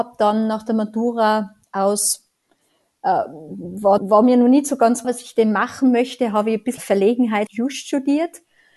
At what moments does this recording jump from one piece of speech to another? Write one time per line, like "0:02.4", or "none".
0:04.0
0:05.0
0:06.8
0:07.5